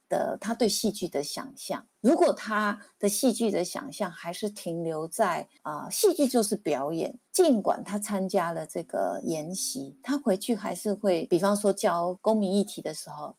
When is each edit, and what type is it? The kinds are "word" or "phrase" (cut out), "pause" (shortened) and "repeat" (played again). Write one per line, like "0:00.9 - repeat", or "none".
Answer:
0:01.9 - pause
0:05.6 - pause
0:07.3 - pause